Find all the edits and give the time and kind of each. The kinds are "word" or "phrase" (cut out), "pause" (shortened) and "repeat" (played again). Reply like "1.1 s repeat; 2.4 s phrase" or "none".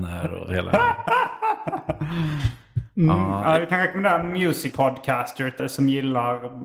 4.7 s word; 5.6 s word